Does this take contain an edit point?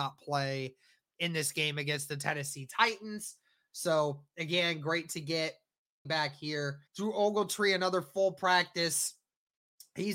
yes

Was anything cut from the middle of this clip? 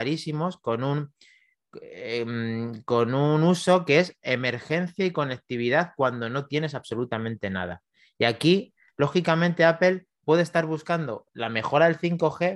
no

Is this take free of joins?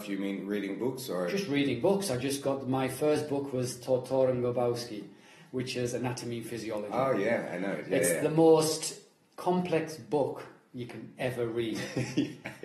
yes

